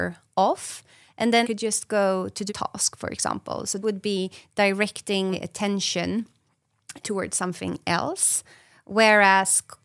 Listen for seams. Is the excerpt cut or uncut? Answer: cut